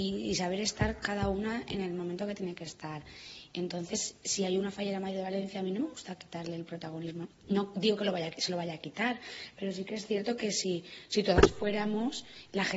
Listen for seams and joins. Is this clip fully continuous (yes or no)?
yes